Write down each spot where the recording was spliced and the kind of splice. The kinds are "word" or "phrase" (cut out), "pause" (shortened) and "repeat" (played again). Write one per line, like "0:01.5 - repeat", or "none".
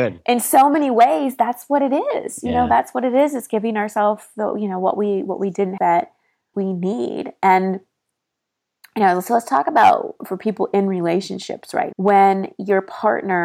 0:05.8 - word
0:06.5 - word
0:11.9 - word

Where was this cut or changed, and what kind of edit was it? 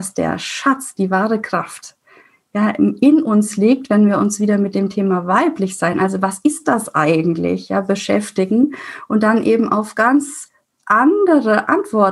none

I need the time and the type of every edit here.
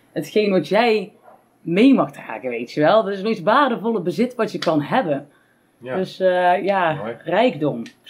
none

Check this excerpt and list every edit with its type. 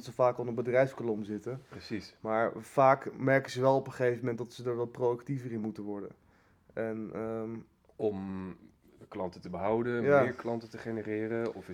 none

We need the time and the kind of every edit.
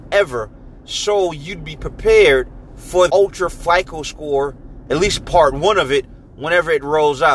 0:03.1 - word
0:04.9 - word

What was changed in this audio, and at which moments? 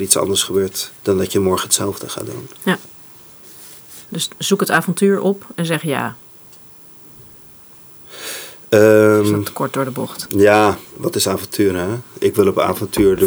0:01.0 - pause
0:04.1 - pause

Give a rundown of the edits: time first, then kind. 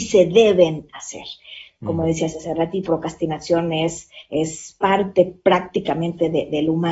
0:02.9 - word
0:04.3 - pause

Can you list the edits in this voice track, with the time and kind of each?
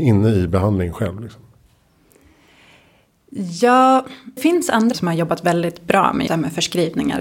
0:04.4 - word
0:04.9 - word
0:06.3 - word

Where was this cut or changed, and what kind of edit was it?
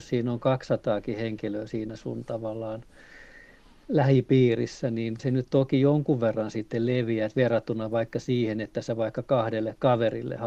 0:05.2 - word

